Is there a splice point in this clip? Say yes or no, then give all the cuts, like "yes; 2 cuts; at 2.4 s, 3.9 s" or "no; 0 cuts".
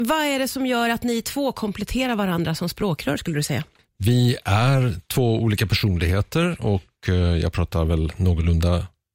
no; 0 cuts